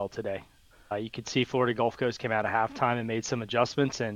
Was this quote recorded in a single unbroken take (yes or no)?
yes